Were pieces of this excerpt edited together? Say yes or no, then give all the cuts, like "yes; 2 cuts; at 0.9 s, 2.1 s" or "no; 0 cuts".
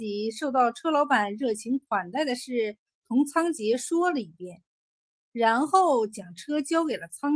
no; 0 cuts